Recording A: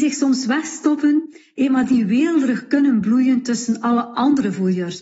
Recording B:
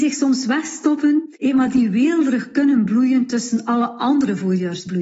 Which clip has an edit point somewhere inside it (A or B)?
B